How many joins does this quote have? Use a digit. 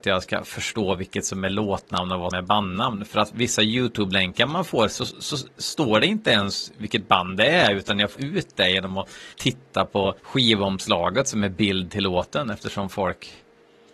4